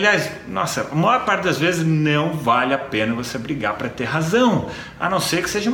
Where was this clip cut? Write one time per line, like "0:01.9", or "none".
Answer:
none